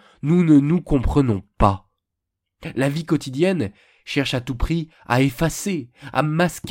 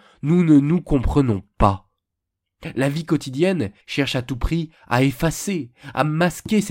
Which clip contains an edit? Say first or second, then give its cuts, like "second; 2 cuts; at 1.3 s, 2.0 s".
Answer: second; 1 cut; at 3.8 s